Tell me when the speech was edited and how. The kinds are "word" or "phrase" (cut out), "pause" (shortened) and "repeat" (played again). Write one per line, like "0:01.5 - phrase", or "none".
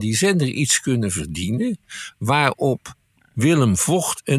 none